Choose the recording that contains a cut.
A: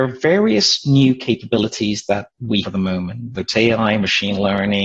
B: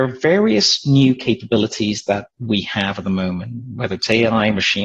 A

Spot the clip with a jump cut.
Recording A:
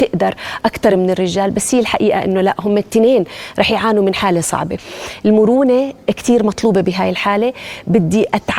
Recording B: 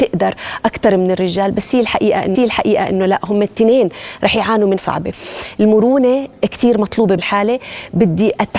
B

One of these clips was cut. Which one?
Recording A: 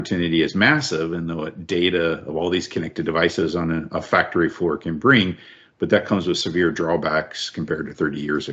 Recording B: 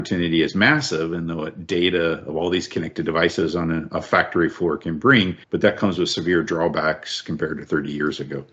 B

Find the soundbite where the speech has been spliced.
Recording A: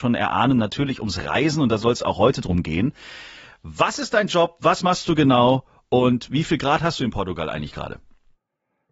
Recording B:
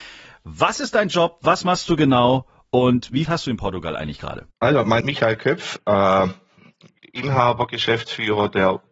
B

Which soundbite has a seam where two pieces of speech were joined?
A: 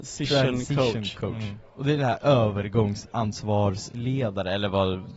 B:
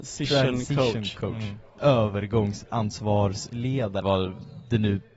B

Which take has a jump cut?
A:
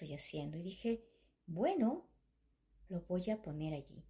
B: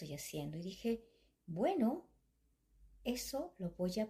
A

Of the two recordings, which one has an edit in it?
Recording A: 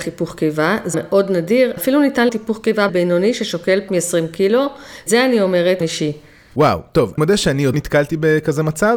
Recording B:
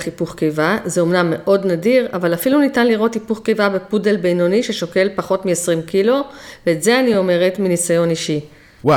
A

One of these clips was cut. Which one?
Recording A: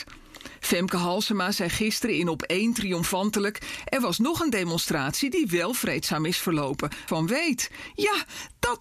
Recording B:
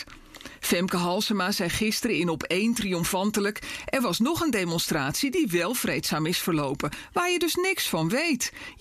A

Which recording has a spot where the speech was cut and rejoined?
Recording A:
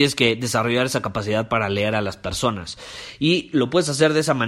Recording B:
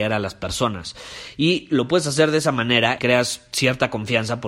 B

